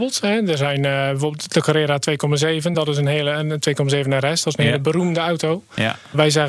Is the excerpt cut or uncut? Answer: uncut